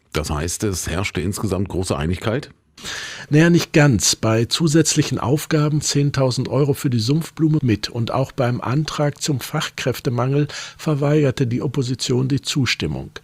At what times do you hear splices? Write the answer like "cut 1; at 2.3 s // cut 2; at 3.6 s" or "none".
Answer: cut 1; at 5.8 s // cut 2; at 7.6 s